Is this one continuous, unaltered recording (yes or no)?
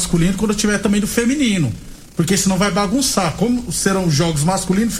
yes